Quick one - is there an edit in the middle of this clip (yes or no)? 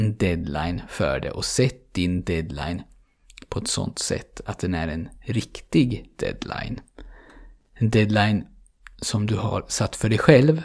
no